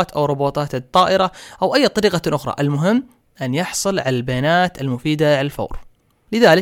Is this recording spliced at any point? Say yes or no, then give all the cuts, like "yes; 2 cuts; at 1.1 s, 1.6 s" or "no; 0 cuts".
no; 0 cuts